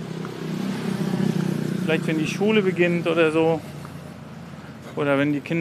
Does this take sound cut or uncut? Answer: uncut